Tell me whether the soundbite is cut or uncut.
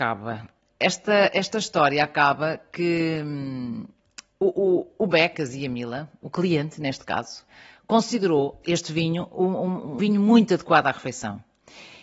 cut